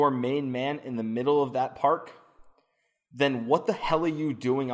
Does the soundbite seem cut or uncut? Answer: uncut